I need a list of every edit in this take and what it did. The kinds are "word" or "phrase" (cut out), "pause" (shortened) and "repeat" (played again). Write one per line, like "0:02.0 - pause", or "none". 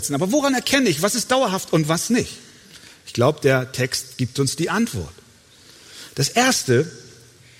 none